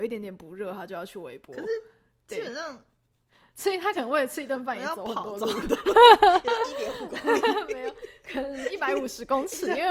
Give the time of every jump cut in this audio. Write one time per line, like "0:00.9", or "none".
none